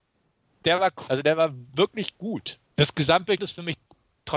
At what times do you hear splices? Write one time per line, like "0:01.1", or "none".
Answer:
0:01.1
0:01.7
0:02.7
0:03.4